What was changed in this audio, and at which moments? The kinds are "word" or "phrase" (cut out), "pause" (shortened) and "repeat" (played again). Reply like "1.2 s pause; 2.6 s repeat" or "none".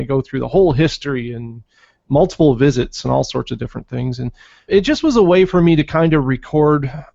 4.7 s word